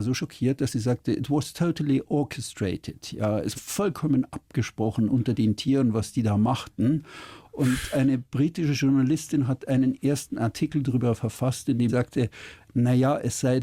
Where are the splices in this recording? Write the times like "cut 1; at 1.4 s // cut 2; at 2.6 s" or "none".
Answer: cut 1; at 3.5 s // cut 2; at 11.9 s